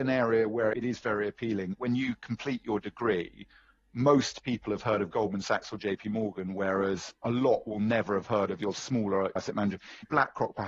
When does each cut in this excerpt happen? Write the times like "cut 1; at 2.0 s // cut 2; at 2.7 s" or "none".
cut 1; at 7.2 s